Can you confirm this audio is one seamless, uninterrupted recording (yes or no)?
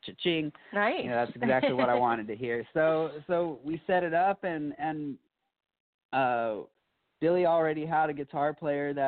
yes